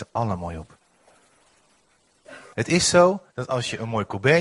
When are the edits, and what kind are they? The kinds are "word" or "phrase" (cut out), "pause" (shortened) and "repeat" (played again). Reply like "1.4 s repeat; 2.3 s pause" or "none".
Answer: 2.5 s pause; 3.3 s pause